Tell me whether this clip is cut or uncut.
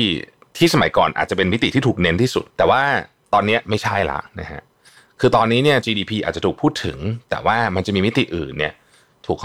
cut